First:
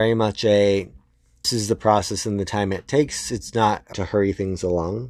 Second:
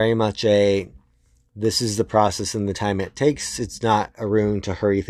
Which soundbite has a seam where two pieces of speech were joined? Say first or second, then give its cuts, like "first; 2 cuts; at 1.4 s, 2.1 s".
first; 2 cuts; at 1.4 s, 3.9 s